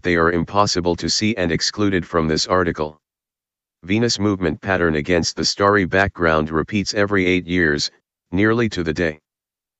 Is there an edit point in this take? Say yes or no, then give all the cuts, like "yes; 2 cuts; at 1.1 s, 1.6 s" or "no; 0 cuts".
no; 0 cuts